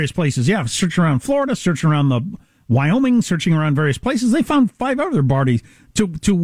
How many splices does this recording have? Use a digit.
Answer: 0